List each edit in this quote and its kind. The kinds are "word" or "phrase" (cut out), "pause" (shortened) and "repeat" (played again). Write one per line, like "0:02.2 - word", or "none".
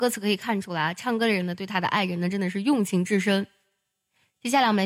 none